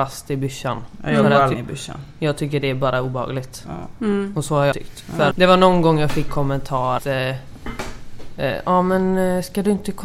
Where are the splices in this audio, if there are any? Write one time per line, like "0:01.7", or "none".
0:01.5
0:04.7
0:05.3
0:06.3
0:07.0